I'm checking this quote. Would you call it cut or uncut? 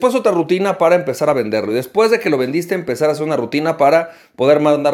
uncut